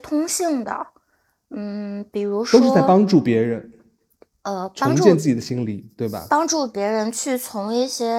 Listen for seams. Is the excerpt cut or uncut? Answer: uncut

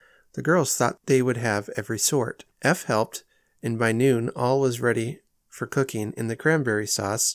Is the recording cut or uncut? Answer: uncut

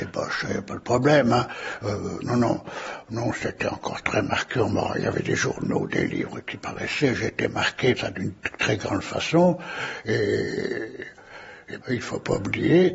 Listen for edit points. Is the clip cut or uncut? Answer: cut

